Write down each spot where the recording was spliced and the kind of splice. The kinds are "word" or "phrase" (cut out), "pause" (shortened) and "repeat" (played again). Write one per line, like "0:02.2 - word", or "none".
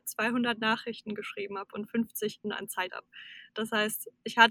0:02.4 - word
0:02.9 - word